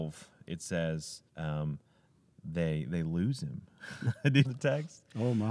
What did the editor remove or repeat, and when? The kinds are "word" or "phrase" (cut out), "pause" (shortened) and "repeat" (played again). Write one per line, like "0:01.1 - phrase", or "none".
0:01.3 - pause
0:02.9 - word
0:04.4 - phrase